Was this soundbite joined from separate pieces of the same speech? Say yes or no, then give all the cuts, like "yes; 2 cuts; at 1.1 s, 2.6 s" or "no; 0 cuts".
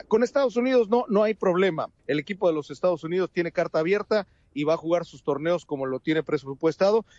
yes; 1 cut; at 2.0 s